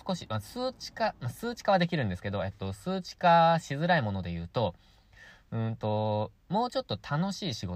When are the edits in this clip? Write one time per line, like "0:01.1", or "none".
none